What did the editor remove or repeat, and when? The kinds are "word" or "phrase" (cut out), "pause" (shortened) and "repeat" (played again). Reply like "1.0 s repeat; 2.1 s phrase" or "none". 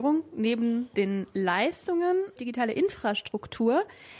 2.4 s phrase